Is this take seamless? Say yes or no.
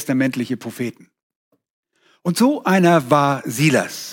yes